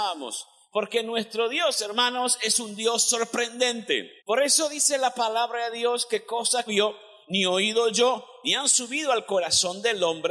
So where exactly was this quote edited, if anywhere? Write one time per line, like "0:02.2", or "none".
0:04.2
0:06.7